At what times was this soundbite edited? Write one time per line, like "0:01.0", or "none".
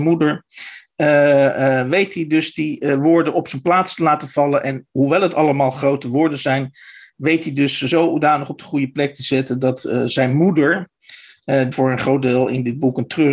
0:11.7